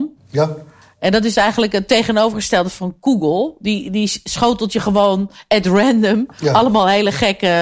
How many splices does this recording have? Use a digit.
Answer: 0